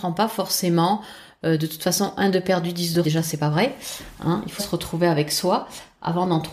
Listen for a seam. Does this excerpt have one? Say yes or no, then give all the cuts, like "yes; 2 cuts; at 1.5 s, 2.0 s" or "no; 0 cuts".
yes; 2 cuts; at 3.0 s, 4.6 s